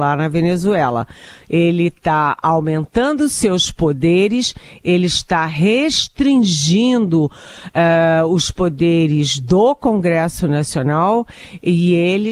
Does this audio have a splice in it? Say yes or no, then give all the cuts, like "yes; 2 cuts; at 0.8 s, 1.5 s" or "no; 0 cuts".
no; 0 cuts